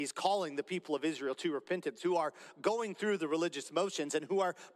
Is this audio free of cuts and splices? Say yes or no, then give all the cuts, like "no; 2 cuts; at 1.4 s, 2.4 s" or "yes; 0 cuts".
yes; 0 cuts